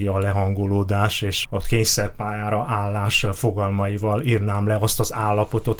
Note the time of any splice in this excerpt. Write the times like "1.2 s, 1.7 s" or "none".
1.4 s